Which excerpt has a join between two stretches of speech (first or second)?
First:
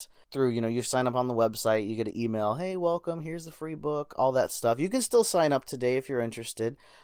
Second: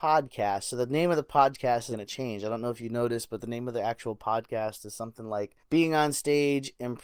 second